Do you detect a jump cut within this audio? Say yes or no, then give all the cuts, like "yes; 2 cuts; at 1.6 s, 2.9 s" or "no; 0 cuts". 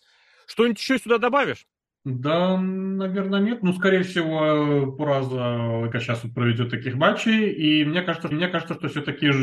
yes; 3 cuts; at 1.8 s, 5.9 s, 8.3 s